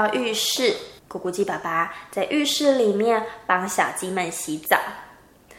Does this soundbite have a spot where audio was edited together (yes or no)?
yes